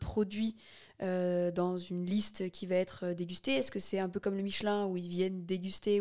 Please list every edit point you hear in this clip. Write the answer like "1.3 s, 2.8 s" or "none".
none